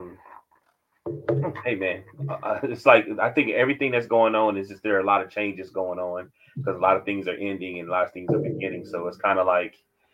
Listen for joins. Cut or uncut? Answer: uncut